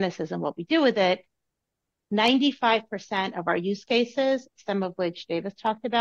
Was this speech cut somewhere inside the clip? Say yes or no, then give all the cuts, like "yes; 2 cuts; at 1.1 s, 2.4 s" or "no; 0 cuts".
no; 0 cuts